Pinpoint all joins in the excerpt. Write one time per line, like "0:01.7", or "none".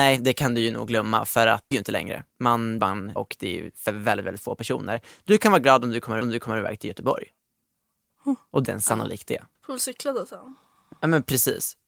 0:01.7
0:02.3
0:02.8
0:03.2
0:06.2
0:08.6
0:09.6